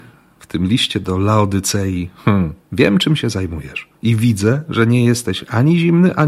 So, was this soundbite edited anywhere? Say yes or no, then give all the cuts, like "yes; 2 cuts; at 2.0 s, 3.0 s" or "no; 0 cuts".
yes; 2 cuts; at 2.6 s, 4.0 s